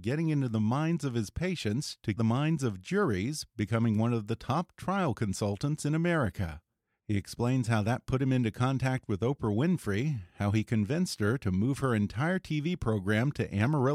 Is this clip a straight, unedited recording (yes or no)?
no